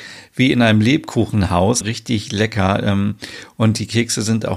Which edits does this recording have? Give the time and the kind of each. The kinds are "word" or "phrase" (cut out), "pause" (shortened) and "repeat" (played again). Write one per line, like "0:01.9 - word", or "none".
0:01.8 - word